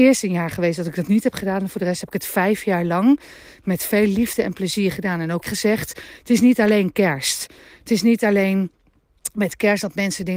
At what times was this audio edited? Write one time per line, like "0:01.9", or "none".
0:05.4